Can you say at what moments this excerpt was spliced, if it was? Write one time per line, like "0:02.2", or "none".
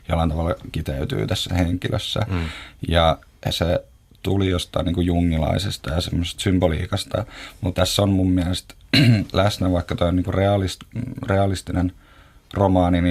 0:01.5
0:03.5
0:05.8
0:07.7